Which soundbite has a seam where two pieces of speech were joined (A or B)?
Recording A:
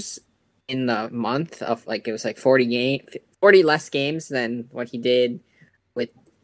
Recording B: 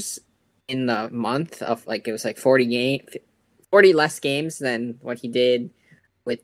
A